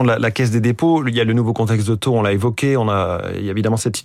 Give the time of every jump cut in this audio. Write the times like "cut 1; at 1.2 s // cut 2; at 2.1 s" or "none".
none